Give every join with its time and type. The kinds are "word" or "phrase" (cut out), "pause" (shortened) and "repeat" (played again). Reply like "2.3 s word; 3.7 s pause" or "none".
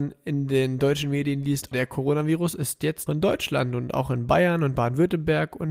1.7 s word; 3.1 s word